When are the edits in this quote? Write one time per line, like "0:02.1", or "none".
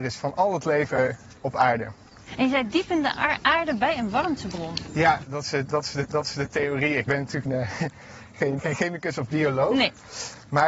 0:01.4
0:06.1
0:07.1
0:07.5
0:08.6